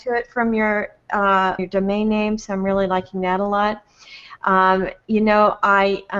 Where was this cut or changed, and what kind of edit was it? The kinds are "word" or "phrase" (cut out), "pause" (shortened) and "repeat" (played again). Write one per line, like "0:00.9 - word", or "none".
0:01.6 - word